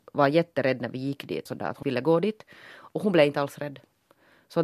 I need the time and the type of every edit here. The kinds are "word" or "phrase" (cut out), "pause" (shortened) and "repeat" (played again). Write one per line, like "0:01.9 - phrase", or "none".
0:01.5 - phrase
0:01.8 - word